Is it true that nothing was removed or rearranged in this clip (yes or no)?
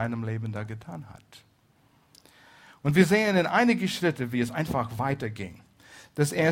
yes